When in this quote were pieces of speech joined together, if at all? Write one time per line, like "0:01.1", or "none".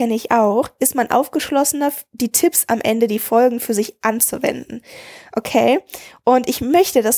none